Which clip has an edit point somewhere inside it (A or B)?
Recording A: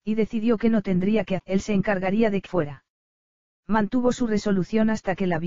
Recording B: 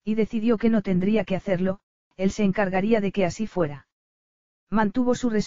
A